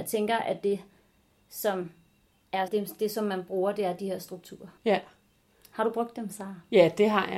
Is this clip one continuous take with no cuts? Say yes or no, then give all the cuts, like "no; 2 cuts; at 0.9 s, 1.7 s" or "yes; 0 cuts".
no; 2 cuts; at 2.7 s, 4.8 s